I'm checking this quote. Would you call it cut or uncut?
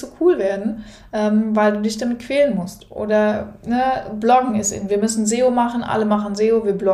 uncut